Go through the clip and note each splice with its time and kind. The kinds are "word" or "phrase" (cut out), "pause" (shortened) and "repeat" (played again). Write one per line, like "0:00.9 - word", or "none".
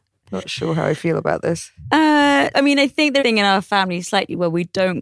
0:02.5 - word
0:03.2 - phrase

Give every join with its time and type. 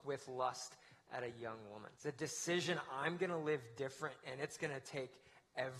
0:01.9 - pause

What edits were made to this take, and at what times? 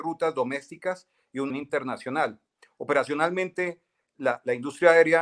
0:01.5 - word

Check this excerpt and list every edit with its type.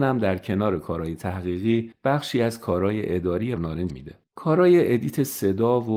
0:03.6 - word
0:03.9 - word
0:04.2 - pause

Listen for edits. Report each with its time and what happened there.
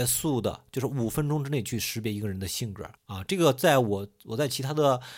0:03.0 - pause

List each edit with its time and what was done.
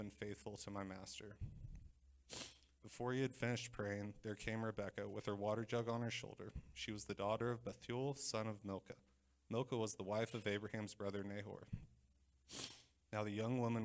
none

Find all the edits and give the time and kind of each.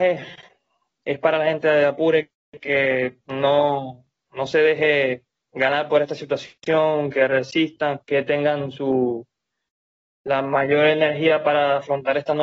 0:03.2 - pause
0:08.0 - pause

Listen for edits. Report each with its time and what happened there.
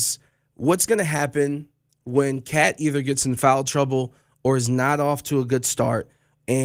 none

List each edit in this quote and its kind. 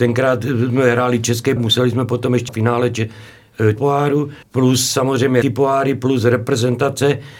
0:01.6 - word
0:02.5 - word
0:03.8 - word
0:04.4 - pause
0:05.4 - word

